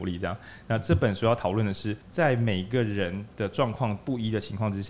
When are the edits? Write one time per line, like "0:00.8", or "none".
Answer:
0:02.0